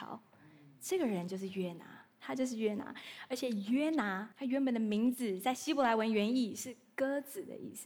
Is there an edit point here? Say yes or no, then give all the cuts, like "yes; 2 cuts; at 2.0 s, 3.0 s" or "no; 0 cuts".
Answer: yes; 1 cut; at 4.3 s